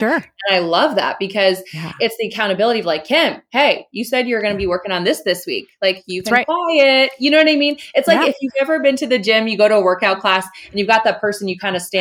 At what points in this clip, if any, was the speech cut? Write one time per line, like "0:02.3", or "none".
none